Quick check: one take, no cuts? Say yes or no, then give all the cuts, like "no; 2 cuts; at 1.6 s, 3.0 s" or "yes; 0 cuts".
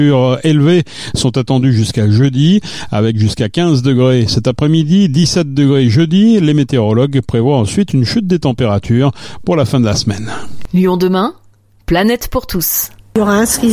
yes; 0 cuts